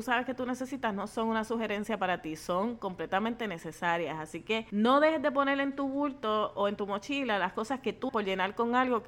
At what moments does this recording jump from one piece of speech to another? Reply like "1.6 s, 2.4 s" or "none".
8.1 s